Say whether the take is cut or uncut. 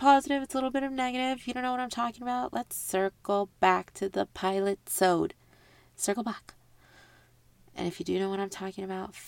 uncut